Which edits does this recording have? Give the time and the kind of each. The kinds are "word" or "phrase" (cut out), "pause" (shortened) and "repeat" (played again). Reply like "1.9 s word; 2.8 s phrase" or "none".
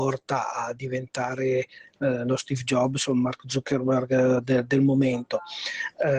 none